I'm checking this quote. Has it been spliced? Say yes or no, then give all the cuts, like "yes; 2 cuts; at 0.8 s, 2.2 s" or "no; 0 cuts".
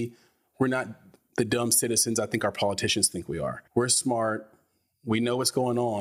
yes; 2 cuts; at 1.3 s, 3.7 s